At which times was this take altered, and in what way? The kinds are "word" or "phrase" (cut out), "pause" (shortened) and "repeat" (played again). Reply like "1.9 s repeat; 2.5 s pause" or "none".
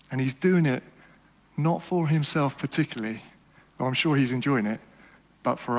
none